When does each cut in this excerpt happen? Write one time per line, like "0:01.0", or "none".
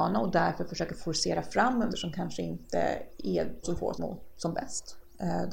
0:01.9
0:03.6
0:03.9